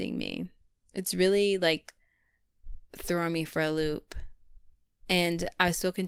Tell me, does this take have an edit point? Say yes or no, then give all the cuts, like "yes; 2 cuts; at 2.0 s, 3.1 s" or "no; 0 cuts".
no; 0 cuts